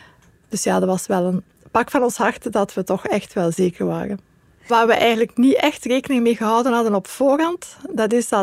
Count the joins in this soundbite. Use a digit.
0